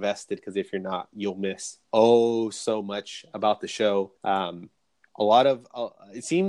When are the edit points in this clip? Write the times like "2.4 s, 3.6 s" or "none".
1.8 s, 4.2 s